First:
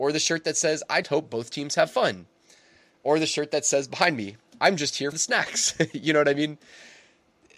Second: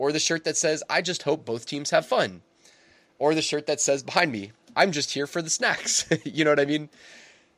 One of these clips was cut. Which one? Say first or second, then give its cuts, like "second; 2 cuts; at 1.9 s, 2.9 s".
first; 2 cuts; at 1.0 s, 5.1 s